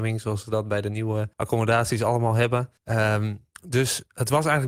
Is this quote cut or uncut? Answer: cut